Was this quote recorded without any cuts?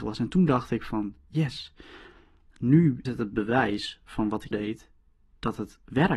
no; 2 cuts; at 3.0 s, 4.5 s

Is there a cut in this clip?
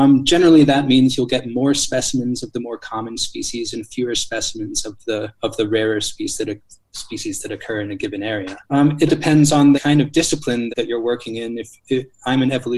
yes; 5 cuts; at 5.4 s, 8.6 s, 9.1 s, 9.7 s, 10.7 s

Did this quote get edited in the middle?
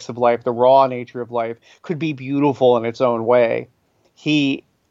no; 0 cuts

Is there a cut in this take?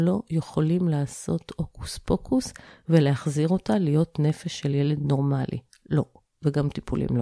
no; 0 cuts

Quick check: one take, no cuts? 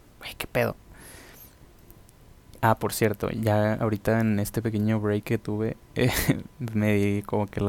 yes; 0 cuts

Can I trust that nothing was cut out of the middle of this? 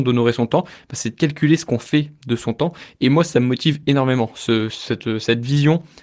yes; 0 cuts

